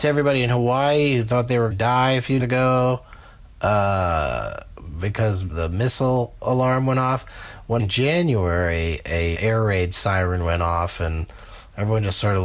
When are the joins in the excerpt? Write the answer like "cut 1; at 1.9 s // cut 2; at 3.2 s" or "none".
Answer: cut 1; at 1.7 s // cut 2; at 2.4 s // cut 3; at 5.5 s // cut 4; at 7.8 s // cut 5; at 9.3 s